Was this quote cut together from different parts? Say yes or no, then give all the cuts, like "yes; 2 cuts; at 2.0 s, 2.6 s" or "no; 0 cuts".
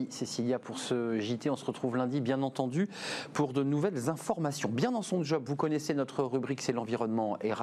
no; 0 cuts